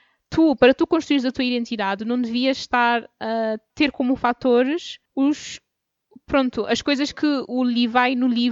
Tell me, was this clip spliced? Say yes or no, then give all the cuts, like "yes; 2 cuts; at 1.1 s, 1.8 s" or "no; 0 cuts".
yes; 1 cut; at 5.0 s